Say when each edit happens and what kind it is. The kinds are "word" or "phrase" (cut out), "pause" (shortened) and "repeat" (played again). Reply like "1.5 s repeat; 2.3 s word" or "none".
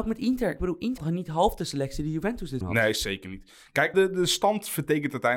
1.0 s word; 2.6 s word; 3.9 s word